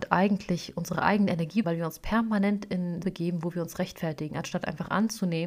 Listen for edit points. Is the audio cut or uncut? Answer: cut